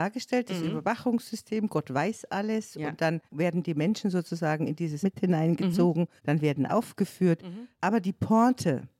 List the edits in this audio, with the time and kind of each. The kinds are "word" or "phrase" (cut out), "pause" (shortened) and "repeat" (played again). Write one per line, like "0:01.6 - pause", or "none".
0:03.3 - pause
0:05.0 - word
0:06.2 - pause
0:06.7 - word